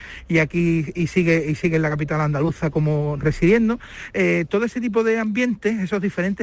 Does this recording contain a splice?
no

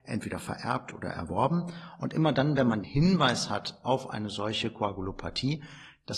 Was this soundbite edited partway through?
yes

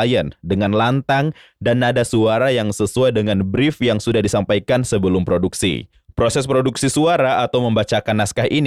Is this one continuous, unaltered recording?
yes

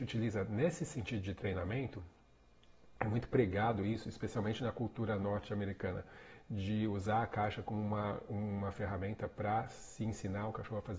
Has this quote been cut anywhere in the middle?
no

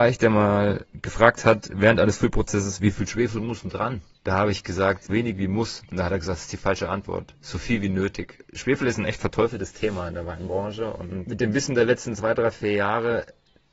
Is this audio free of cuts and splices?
no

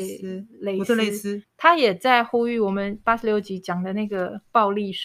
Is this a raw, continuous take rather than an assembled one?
no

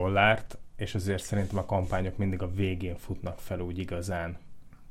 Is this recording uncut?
yes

